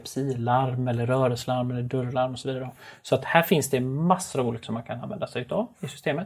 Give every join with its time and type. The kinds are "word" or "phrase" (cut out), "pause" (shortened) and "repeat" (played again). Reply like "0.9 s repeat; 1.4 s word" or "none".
4.6 s word